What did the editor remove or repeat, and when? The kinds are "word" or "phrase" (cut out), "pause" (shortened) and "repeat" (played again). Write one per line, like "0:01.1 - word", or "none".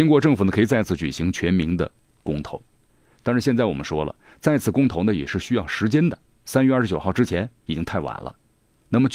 none

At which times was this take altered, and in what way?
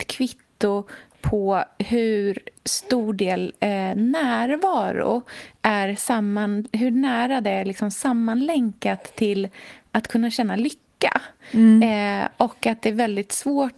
0:02.6 - pause

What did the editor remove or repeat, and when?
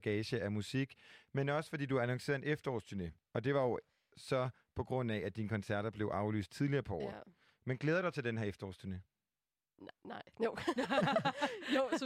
none

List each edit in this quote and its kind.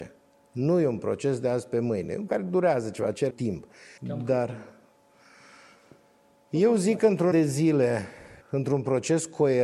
0:02.3 - word
0:03.3 - word
0:04.0 - pause
0:07.3 - word
0:08.4 - pause

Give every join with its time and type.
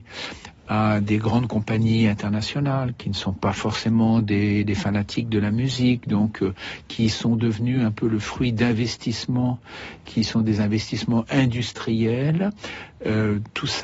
none

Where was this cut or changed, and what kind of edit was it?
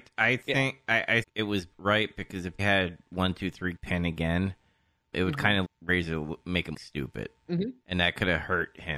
0:01.2 - word
0:01.7 - word
0:02.6 - word
0:03.8 - word
0:05.1 - word
0:05.6 - word
0:06.4 - word
0:06.7 - word
0:07.4 - word

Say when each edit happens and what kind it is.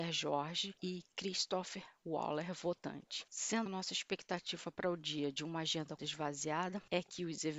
0:03.7 - word
0:06.0 - word

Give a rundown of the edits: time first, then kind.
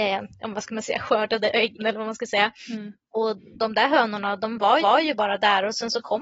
0:01.8 - word
0:03.4 - word
0:04.8 - repeat

